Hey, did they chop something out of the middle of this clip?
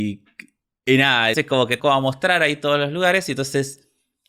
yes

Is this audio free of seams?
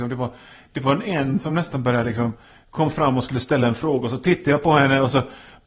yes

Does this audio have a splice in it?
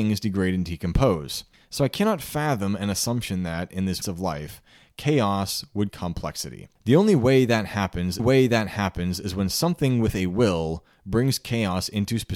yes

